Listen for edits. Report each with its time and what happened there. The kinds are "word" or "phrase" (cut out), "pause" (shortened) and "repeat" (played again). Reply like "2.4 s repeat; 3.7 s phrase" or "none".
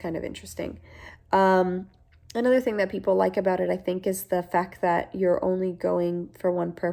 none